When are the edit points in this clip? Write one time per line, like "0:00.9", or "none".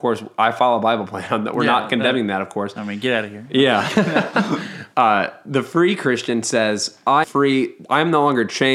0:04.9
0:07.2